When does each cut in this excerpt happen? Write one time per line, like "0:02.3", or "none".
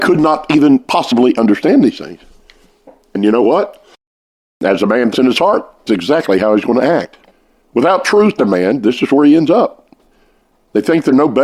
0:05.1
0:05.9
0:07.3
0:08.4